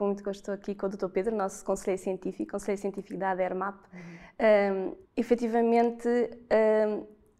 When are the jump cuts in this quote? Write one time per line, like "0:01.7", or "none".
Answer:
0:05.0